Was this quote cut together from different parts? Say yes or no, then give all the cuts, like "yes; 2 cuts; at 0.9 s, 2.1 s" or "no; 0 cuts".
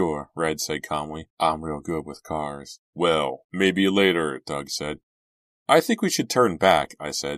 yes; 2 cuts; at 1.3 s, 2.8 s